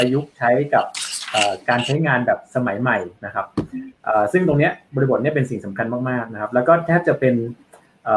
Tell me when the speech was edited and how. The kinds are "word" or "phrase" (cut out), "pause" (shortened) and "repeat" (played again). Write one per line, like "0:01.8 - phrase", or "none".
0:03.1 - pause